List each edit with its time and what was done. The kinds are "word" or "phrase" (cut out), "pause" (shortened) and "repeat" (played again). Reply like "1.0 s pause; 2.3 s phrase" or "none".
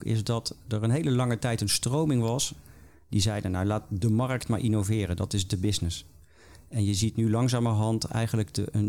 none